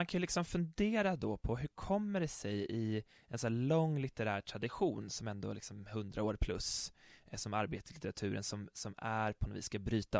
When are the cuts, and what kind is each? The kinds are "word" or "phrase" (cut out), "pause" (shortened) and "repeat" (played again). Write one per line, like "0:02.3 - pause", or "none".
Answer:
none